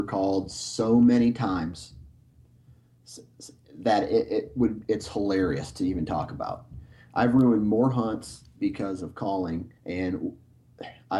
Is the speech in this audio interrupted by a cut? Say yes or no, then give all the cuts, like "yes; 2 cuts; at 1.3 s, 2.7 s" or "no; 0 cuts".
yes; 1 cut; at 9.8 s